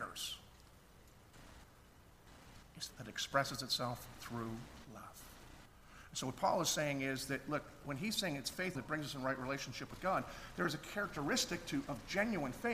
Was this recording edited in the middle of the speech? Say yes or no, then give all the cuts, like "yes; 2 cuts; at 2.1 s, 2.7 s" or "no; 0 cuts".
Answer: yes; 2 cuts; at 2.9 s, 8.8 s